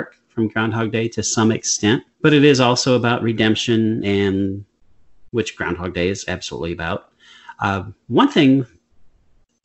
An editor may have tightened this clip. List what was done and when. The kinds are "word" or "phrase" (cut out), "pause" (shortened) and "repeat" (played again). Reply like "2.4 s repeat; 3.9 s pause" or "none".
2.1 s pause